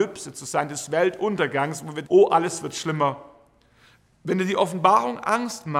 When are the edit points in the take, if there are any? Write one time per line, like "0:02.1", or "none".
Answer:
0:02.0